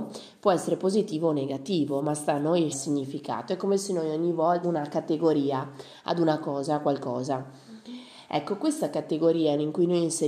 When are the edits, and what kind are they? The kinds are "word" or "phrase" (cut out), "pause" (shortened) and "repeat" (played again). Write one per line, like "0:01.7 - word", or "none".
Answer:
0:02.7 - phrase
0:04.6 - word